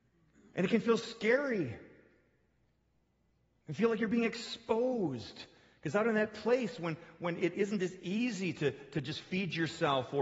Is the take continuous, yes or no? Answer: yes